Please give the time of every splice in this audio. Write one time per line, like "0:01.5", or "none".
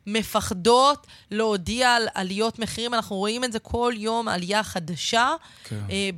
none

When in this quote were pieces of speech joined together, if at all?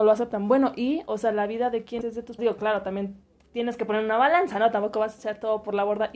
0:02.0
0:02.4

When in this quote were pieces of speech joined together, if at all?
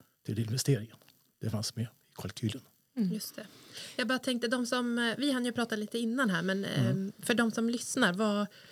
none

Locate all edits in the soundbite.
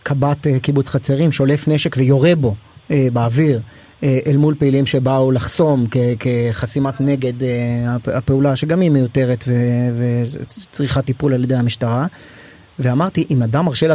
none

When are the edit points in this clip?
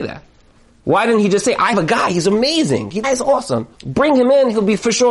0:01.7
0:03.0
0:03.7

